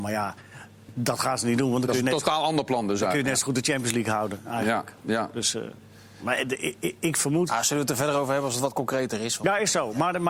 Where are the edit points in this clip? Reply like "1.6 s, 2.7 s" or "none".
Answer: none

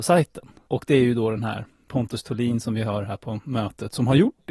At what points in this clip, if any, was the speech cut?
none

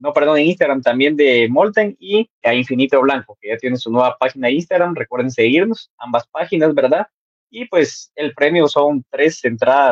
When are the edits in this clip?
2.4 s

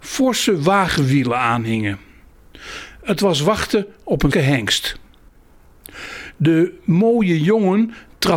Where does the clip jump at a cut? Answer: 4.3 s

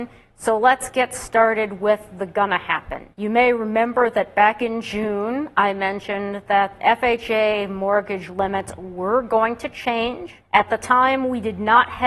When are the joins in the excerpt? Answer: 3.1 s, 6.8 s, 10.4 s

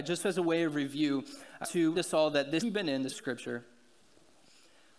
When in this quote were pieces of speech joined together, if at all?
1.6 s, 1.9 s, 2.6 s, 3.1 s

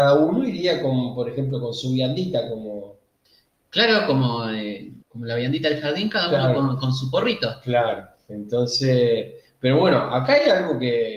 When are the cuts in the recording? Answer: 3.2 s, 5.0 s

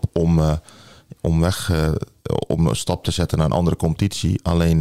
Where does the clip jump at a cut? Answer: none

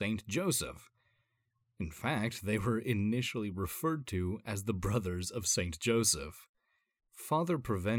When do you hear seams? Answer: none

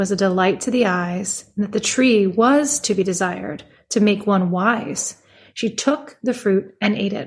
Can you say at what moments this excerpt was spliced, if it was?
none

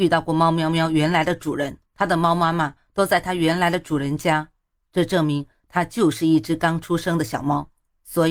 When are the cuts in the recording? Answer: 1.9 s

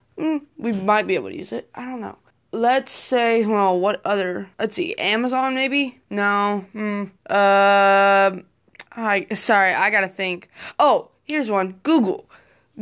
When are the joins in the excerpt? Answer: 2.3 s, 4.5 s, 6.0 s, 7.2 s, 8.9 s

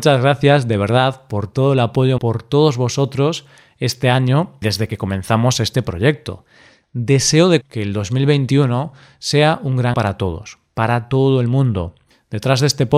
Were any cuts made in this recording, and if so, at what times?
2.2 s, 4.6 s, 7.6 s, 9.9 s

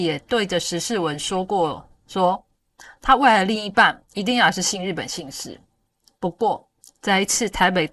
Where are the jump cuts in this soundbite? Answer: none

